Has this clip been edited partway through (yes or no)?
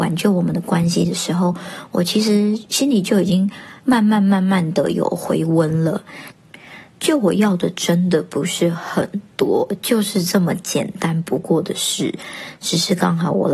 yes